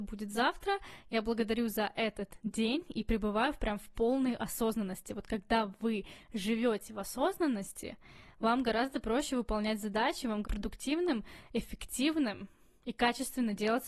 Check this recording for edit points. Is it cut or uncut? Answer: cut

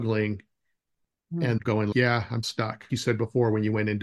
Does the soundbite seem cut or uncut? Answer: cut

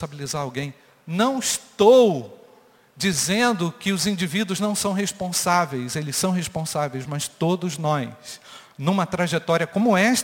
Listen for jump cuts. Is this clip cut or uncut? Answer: uncut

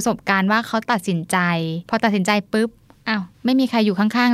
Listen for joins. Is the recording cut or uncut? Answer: cut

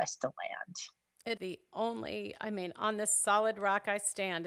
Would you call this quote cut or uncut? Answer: cut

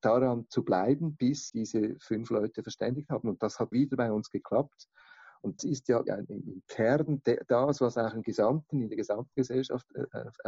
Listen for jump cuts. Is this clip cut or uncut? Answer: cut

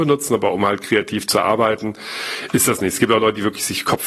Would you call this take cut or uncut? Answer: uncut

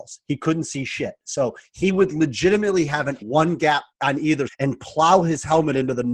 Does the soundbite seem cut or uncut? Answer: cut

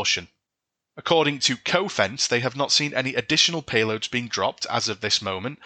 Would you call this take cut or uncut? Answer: uncut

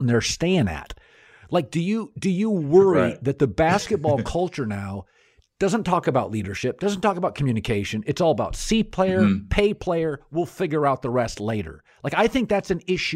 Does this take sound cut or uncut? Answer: uncut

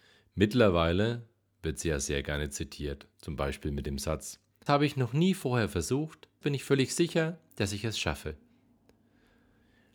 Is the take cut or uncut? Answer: cut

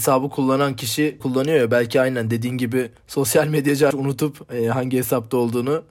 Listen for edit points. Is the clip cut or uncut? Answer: cut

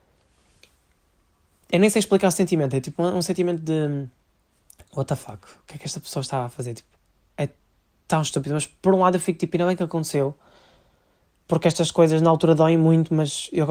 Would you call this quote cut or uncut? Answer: uncut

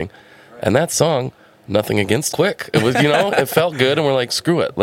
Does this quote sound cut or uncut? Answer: cut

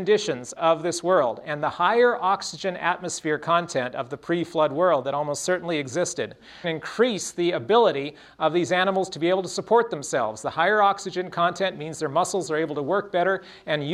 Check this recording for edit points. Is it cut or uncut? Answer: cut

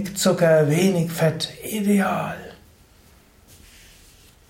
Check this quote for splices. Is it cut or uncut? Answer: uncut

